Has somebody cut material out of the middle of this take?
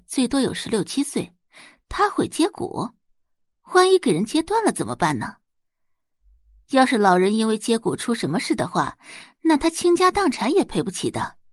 no; 0 cuts

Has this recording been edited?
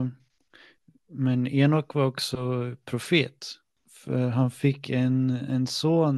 no; 0 cuts

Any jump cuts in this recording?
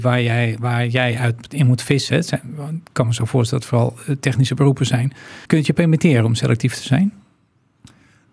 yes; 1 cut; at 5.5 s

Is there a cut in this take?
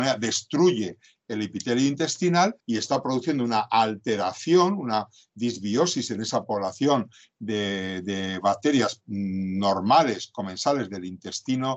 yes; 1 cut; at 2.6 s

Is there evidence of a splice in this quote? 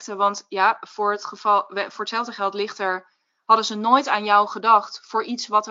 no; 0 cuts

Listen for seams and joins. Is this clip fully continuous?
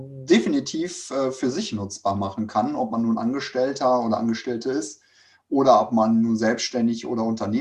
yes; 0 cuts

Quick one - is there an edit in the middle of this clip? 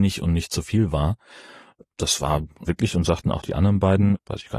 yes; 1 cut; at 2.7 s

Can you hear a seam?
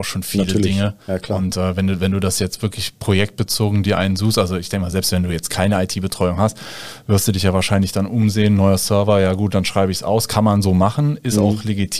no; 0 cuts

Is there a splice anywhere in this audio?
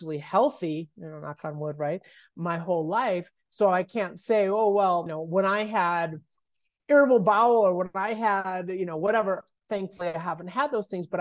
yes; 1 cut; at 5.1 s

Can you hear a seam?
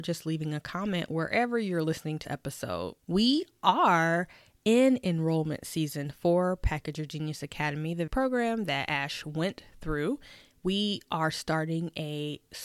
yes; 3 cuts; at 2.2 s, 3.0 s, 8.1 s

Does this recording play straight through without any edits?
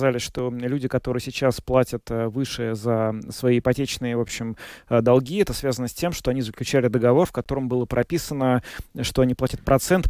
yes; 0 cuts

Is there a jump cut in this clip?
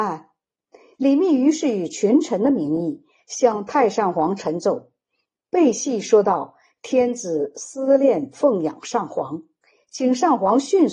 no; 0 cuts

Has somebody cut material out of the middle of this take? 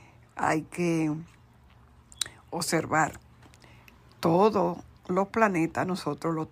no; 0 cuts

